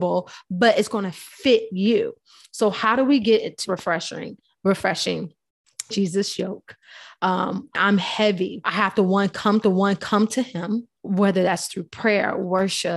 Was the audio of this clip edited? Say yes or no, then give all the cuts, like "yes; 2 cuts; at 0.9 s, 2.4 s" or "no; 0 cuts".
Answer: yes; 6 cuts; at 3.6 s, 5.9 s, 7.7 s, 8.6 s, 9.6 s, 11.0 s